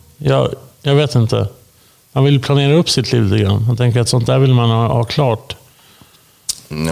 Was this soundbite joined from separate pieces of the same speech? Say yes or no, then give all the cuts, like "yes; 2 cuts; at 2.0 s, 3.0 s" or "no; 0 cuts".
no; 0 cuts